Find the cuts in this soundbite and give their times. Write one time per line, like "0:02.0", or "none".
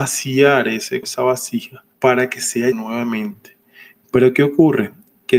0:01.0
0:01.9
0:02.7